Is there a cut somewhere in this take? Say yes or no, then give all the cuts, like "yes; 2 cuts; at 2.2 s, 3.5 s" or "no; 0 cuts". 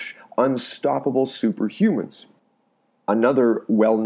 no; 0 cuts